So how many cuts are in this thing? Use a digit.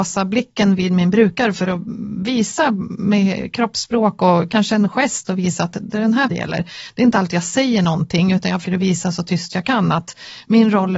2